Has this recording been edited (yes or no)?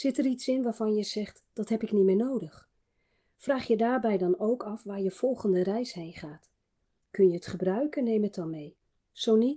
no